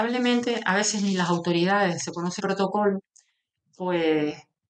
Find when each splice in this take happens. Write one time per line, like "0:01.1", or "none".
0:02.4